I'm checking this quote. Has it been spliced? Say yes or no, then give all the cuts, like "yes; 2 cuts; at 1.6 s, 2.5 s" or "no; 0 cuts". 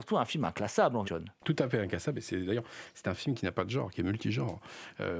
yes; 1 cut; at 1.0 s